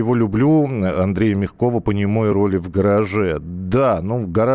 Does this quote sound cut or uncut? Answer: uncut